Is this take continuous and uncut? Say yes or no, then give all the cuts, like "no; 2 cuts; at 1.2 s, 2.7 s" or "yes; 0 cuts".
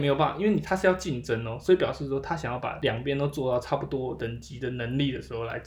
yes; 0 cuts